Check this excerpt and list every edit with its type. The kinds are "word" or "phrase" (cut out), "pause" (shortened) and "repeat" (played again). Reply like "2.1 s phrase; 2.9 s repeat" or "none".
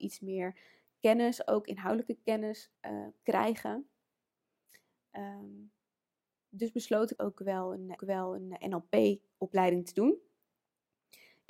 2.8 s pause; 7.2 s phrase; 8.0 s repeat